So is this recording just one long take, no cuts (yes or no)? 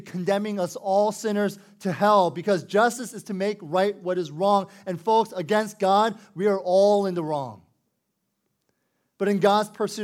yes